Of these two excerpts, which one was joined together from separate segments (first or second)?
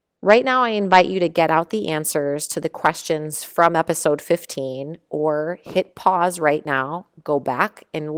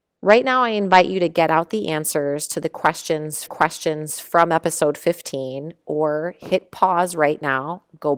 second